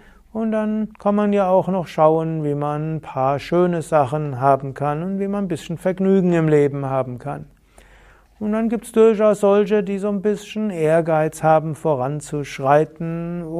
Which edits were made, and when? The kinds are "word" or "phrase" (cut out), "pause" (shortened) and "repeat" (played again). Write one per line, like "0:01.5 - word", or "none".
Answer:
0:00.9 - pause